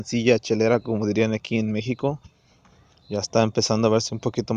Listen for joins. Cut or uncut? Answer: uncut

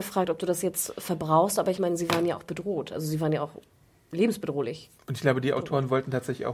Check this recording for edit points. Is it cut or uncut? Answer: uncut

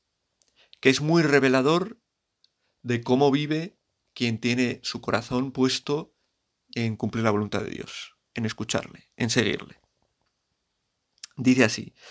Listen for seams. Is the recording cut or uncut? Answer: uncut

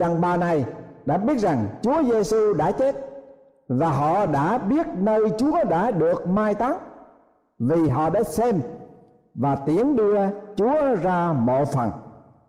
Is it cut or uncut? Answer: uncut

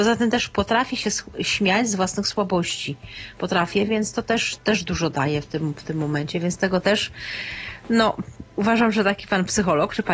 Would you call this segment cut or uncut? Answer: cut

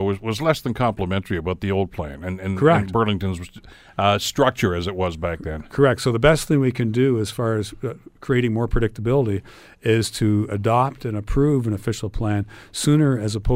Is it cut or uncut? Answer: uncut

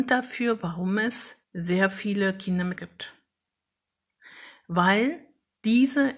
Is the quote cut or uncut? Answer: cut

